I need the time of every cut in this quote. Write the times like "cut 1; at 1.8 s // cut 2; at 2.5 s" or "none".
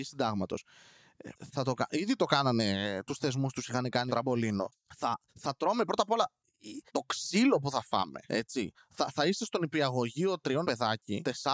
cut 1; at 1.5 s // cut 2; at 4.1 s // cut 3; at 5.3 s // cut 4; at 6.9 s // cut 5; at 10.6 s